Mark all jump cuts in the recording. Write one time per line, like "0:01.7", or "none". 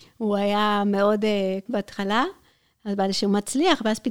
0:01.7